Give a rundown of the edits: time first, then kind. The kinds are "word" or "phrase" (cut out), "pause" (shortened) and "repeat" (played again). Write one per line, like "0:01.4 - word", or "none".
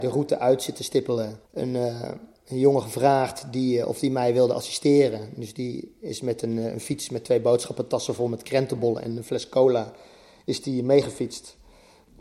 0:01.4 - pause